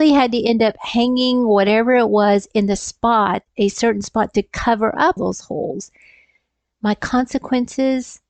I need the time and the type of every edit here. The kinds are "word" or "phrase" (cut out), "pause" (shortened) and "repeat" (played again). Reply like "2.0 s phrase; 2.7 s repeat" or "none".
5.2 s word